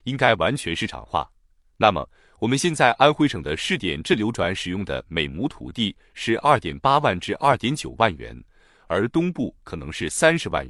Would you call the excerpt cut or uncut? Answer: uncut